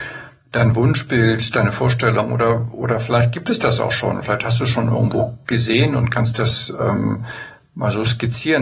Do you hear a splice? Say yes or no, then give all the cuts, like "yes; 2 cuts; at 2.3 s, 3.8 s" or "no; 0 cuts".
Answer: no; 0 cuts